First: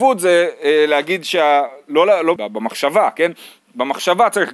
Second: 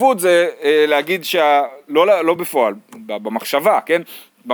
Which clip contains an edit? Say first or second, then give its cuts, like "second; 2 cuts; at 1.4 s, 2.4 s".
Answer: first; 1 cut; at 2.4 s